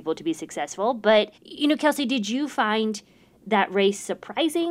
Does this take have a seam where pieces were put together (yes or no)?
yes